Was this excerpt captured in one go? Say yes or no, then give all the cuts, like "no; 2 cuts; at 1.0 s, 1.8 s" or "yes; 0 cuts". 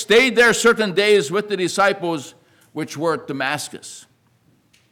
yes; 0 cuts